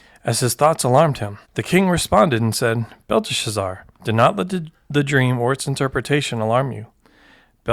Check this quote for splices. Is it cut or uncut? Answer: cut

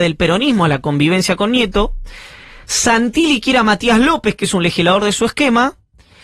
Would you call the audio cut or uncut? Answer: uncut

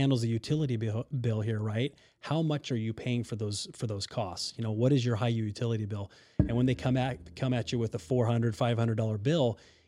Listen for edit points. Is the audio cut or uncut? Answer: uncut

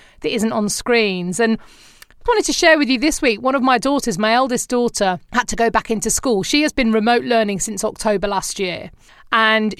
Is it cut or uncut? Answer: cut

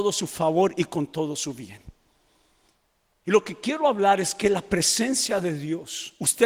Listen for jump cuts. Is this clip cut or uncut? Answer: uncut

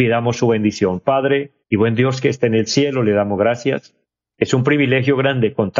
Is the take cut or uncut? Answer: cut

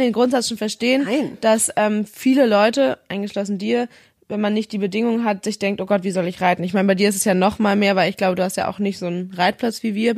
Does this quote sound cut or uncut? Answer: uncut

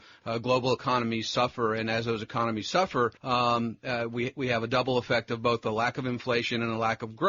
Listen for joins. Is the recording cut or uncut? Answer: cut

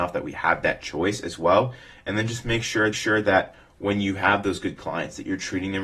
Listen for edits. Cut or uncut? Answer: cut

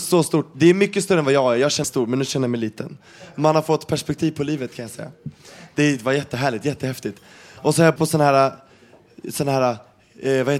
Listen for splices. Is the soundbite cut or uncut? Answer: cut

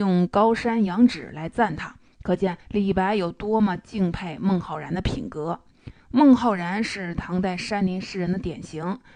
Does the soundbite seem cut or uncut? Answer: cut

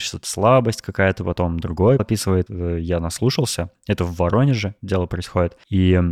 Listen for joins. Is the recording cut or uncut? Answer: cut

